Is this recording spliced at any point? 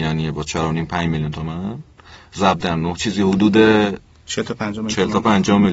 no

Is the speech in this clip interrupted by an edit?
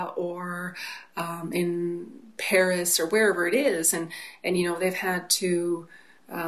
no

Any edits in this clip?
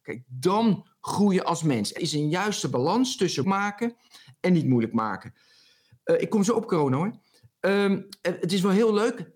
yes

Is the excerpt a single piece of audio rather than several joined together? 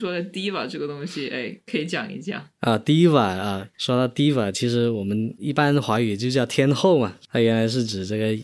no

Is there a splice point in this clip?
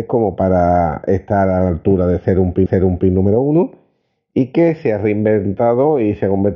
yes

